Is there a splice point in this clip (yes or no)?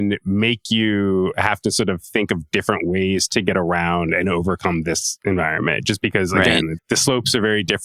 yes